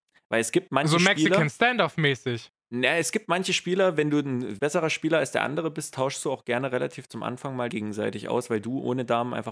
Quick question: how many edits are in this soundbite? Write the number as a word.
two